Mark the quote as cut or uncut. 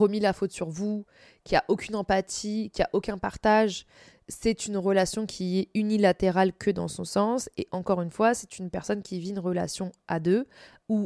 uncut